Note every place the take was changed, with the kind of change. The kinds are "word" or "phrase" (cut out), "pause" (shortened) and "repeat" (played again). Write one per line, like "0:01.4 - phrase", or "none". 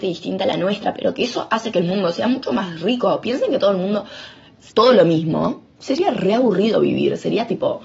0:04.7 - word